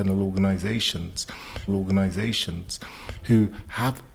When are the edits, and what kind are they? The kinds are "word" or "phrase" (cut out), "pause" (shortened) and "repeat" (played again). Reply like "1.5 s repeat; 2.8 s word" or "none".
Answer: 1.7 s repeat